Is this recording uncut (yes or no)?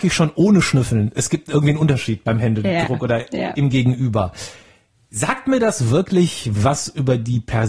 yes